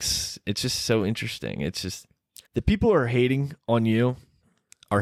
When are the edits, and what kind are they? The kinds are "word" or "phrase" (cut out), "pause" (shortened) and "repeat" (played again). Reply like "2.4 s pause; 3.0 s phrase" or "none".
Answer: 2.5 s pause